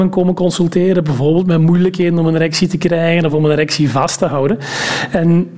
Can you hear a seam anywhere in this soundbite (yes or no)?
no